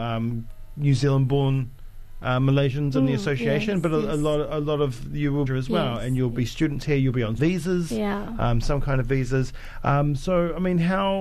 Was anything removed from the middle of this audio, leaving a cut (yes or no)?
yes